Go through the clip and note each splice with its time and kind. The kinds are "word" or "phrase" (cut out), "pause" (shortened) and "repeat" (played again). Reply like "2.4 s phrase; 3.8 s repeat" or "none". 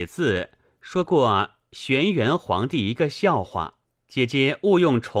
3.8 s pause